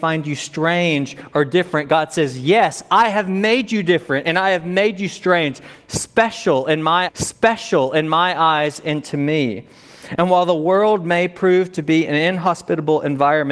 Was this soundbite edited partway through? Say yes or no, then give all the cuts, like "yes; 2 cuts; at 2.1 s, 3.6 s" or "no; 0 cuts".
yes; 1 cut; at 7.1 s